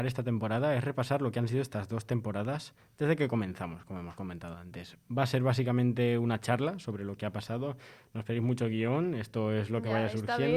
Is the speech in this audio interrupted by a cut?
no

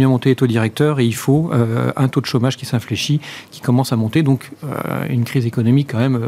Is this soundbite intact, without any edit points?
yes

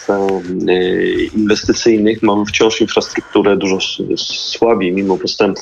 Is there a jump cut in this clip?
no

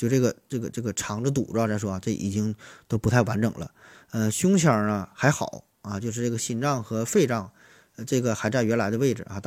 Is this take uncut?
yes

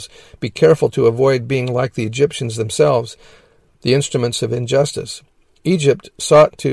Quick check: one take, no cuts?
yes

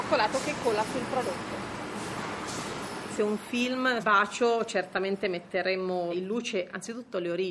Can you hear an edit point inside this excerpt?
yes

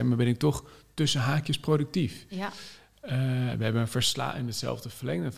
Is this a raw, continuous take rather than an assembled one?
yes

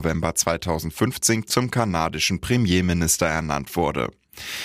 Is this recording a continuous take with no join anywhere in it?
yes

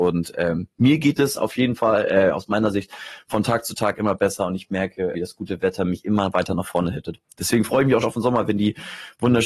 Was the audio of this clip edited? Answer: yes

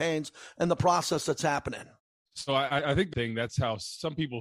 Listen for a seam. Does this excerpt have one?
yes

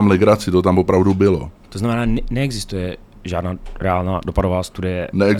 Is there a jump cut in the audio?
no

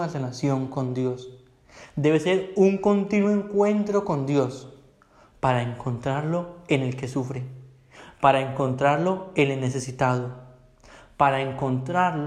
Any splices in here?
no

